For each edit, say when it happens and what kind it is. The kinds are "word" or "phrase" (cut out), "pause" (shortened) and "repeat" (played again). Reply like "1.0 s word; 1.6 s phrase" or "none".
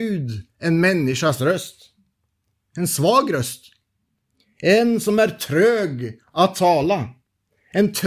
none